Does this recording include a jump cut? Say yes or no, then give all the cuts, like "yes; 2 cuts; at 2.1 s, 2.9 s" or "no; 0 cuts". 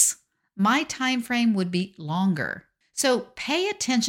no; 0 cuts